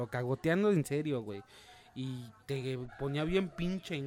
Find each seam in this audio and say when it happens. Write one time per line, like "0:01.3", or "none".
0:02.4